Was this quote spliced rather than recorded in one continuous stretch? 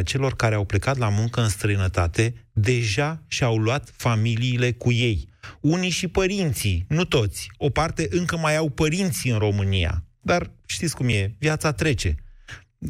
no; 0 cuts

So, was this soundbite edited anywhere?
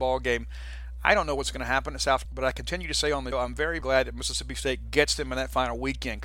yes; 3 cuts; at 2.2 s, 3.3 s, 3.8 s

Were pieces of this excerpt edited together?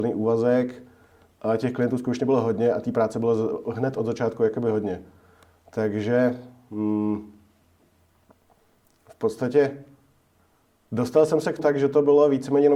yes; 1 cut; at 11.6 s

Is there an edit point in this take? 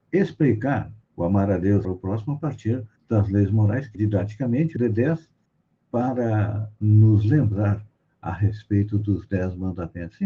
yes; 6 cuts; at 1.0 s, 1.8 s, 3.0 s, 3.9 s, 4.8 s, 5.5 s

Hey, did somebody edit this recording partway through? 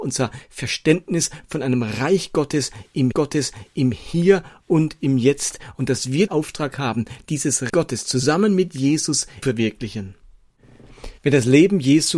yes; 5 cuts; at 3.1 s, 6.3 s, 7.7 s, 9.4 s, 11.2 s

